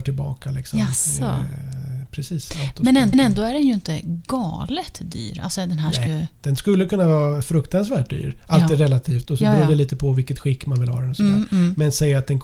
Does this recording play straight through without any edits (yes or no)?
no